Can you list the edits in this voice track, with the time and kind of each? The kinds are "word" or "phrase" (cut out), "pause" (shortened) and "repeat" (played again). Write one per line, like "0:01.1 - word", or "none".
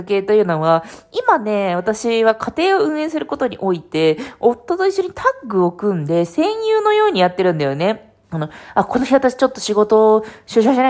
0:08.2 - pause